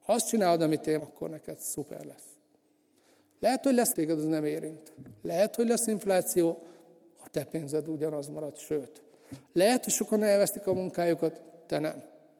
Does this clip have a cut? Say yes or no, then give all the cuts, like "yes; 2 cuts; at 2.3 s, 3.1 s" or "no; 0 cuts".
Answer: yes; 2 cuts; at 1.0 s, 3.9 s